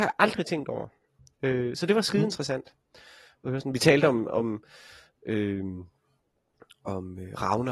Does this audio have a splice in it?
no; 0 cuts

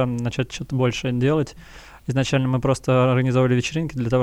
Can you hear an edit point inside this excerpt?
no; 0 cuts

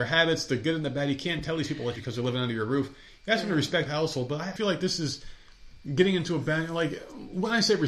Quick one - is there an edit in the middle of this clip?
yes; 3 cuts; at 2.0 s, 3.9 s, 4.6 s

